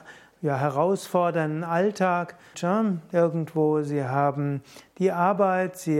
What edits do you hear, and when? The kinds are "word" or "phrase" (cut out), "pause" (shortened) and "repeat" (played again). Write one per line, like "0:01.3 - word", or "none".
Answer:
0:02.5 - word